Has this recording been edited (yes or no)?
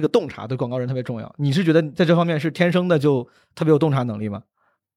no